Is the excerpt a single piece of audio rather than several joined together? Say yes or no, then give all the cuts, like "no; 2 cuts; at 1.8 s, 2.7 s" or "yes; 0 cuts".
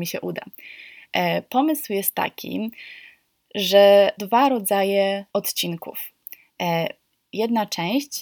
no; 2 cuts; at 4.2 s, 5.3 s